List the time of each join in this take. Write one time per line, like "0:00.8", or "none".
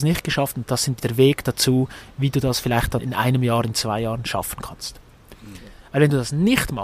0:01.0
0:03.0